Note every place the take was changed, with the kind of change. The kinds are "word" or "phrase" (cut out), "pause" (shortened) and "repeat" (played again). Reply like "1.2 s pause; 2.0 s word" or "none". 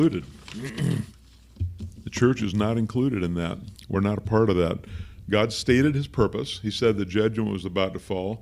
none